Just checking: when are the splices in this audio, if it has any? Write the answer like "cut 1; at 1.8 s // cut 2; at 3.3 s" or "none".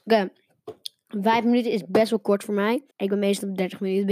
cut 1; at 2.9 s